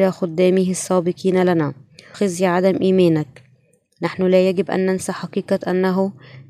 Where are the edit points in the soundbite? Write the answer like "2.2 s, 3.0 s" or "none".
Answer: 2.1 s